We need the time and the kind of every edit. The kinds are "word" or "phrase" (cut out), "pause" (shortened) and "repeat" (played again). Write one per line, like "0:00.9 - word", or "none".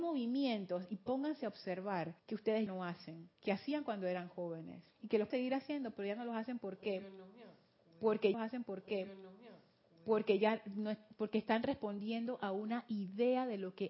0:02.2 - pause
0:02.7 - word
0:03.3 - pause
0:04.9 - pause
0:05.3 - word
0:08.3 - repeat